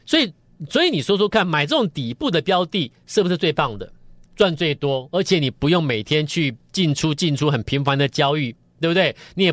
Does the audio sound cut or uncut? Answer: uncut